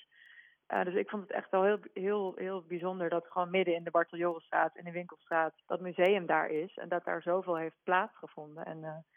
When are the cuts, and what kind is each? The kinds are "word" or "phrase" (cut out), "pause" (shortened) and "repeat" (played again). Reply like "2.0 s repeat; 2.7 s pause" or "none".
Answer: 5.6 s pause